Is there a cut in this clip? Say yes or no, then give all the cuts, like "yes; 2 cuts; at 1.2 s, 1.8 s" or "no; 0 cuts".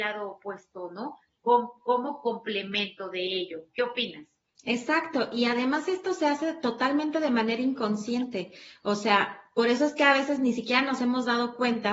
no; 0 cuts